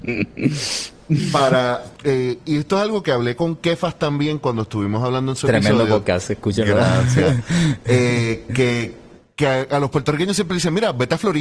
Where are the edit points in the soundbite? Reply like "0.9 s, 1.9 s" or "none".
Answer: none

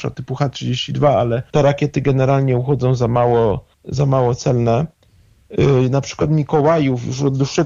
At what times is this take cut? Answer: 1.5 s, 3.7 s

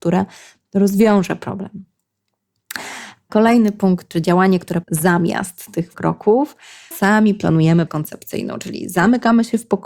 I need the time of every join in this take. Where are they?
4.8 s, 5.9 s, 6.9 s, 7.9 s

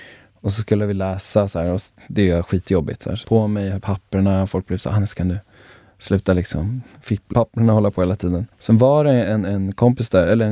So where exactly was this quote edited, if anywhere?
3.2 s, 3.8 s, 7.3 s, 8.5 s

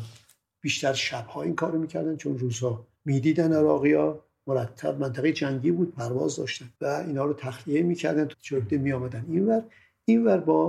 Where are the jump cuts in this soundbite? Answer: 2.9 s, 6.7 s, 8.3 s

